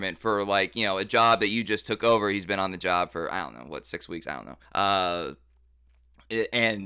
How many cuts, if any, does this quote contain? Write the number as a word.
one